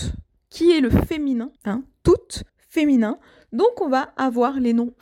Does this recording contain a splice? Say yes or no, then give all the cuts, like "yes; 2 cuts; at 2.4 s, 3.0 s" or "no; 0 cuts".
yes; 2 cuts; at 1.6 s, 2.5 s